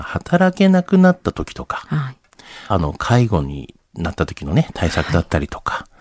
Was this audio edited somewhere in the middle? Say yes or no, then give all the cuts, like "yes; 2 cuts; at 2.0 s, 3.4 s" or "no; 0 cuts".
yes; 1 cut; at 2.7 s